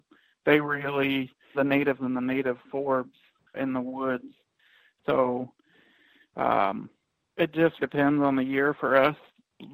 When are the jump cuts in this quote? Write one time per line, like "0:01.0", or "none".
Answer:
0:01.5
0:02.0
0:03.5
0:07.8